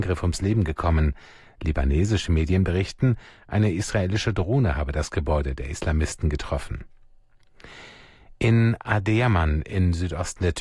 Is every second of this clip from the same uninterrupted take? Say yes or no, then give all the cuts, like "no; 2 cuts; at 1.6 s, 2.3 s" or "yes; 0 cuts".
yes; 0 cuts